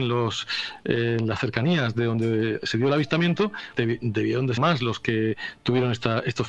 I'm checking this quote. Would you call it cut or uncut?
cut